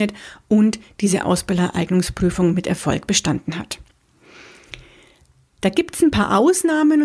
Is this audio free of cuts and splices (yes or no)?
yes